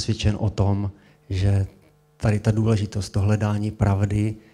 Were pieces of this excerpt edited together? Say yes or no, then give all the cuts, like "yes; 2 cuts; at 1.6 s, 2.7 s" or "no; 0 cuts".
no; 0 cuts